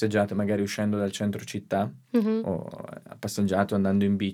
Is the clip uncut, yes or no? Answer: yes